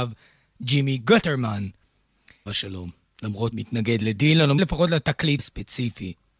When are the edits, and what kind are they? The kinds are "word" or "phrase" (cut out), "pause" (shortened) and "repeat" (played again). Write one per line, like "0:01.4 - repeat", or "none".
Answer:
0:02.5 - word
0:03.5 - word
0:04.6 - word
0:05.4 - word